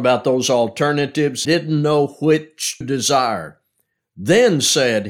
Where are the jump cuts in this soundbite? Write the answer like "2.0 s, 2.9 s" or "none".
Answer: 1.4 s, 2.8 s